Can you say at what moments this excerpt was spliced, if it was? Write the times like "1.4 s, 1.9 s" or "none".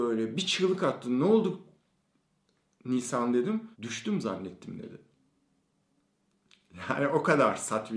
3.7 s